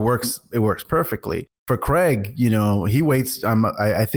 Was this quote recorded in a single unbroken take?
yes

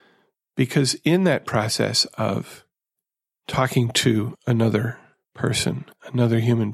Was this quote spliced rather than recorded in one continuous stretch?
no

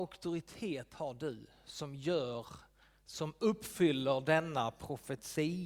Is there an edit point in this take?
no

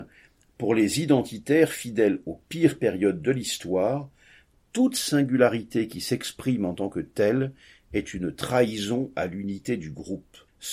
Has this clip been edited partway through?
no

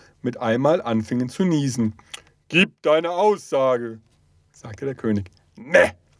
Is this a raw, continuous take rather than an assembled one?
yes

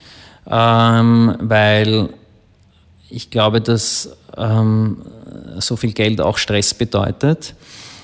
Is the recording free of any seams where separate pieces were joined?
yes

